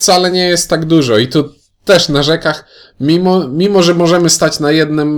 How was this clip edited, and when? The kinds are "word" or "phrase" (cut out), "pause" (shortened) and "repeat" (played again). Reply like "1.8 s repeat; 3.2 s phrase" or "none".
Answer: none